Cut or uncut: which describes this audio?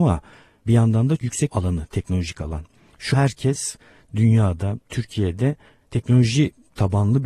cut